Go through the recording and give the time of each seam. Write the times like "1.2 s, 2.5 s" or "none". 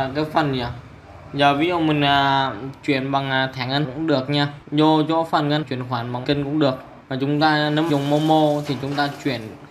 3.8 s, 4.6 s, 5.6 s, 6.2 s, 7.0 s, 7.9 s